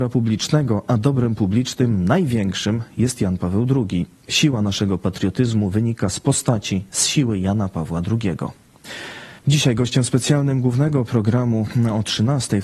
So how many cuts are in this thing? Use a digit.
1